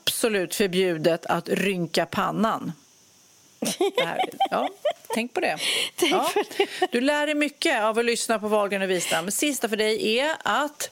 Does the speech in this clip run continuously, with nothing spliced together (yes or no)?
no